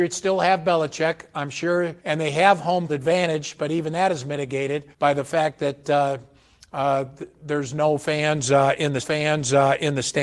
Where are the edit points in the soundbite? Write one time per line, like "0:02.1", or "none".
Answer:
0:02.0
0:02.9
0:04.9
0:09.0